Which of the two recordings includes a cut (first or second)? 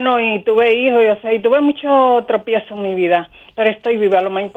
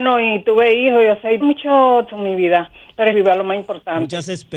second